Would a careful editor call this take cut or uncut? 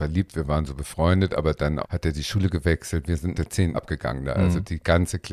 cut